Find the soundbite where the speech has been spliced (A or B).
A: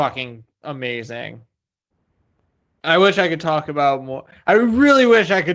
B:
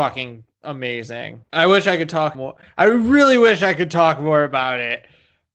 B